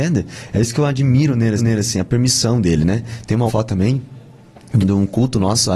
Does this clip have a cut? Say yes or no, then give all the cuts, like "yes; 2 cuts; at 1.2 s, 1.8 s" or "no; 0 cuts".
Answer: yes; 3 cuts; at 1.6 s, 3.5 s, 4.8 s